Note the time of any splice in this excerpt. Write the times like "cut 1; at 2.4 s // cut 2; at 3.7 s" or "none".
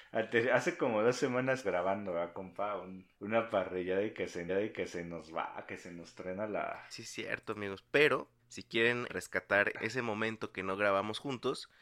cut 1; at 1.6 s // cut 2; at 3.1 s // cut 3; at 4.5 s // cut 4; at 6.9 s // cut 5; at 8.4 s // cut 6; at 9.1 s // cut 7; at 9.7 s